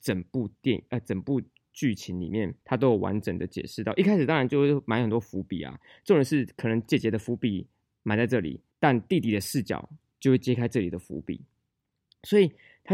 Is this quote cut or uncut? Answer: cut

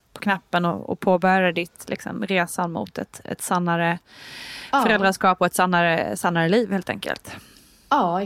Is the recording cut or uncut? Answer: uncut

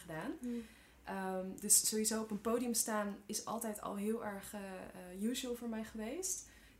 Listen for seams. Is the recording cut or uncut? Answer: uncut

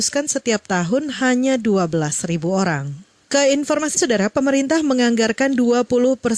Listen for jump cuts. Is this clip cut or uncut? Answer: cut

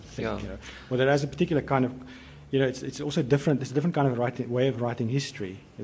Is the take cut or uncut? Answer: uncut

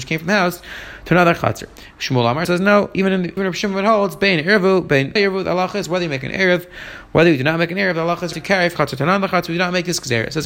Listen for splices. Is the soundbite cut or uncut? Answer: cut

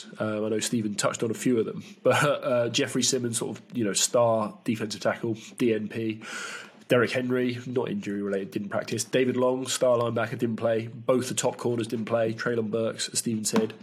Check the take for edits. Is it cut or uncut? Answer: uncut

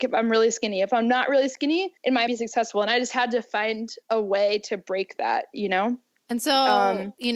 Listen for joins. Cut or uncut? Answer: cut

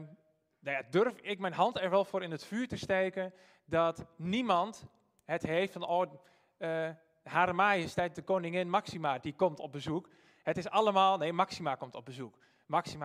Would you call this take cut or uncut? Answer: uncut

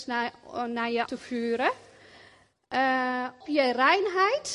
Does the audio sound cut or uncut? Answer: cut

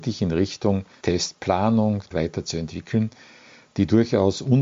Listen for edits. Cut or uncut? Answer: cut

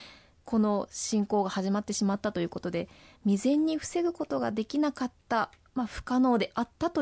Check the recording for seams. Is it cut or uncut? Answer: uncut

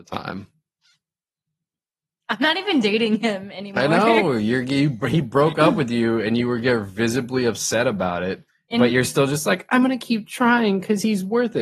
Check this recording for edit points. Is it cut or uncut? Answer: uncut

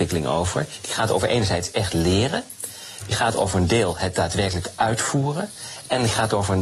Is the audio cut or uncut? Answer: uncut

